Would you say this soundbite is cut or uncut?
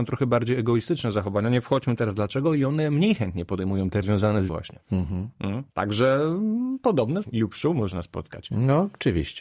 cut